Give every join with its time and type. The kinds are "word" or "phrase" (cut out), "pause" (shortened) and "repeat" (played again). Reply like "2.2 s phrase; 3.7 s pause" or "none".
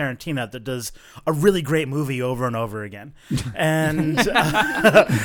none